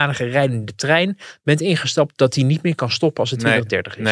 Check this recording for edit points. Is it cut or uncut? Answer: uncut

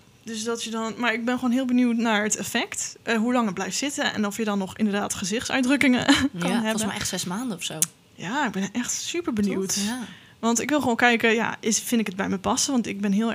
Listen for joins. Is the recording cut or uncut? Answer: uncut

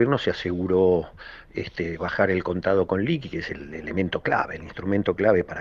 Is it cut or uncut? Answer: uncut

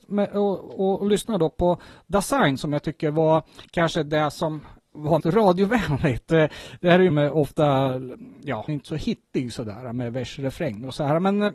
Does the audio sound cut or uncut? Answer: cut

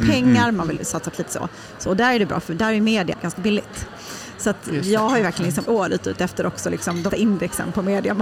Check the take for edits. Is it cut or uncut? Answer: cut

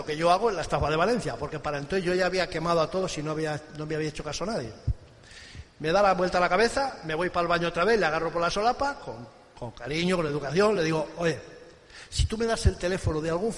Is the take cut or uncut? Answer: uncut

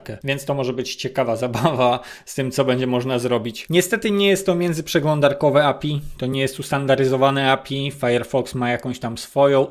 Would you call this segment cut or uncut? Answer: uncut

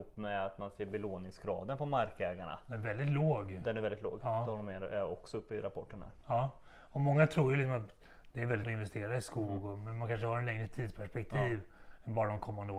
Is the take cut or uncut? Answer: cut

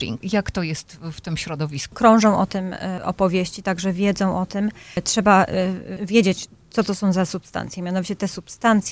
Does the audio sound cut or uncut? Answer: uncut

